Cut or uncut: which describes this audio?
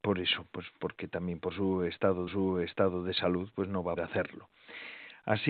cut